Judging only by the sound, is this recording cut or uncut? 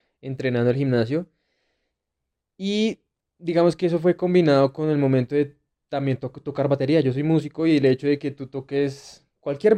uncut